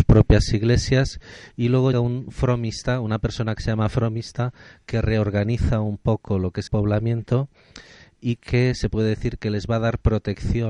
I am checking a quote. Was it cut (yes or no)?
yes